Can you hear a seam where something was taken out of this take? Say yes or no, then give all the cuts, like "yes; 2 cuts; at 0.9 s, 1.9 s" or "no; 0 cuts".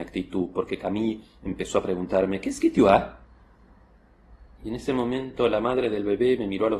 no; 0 cuts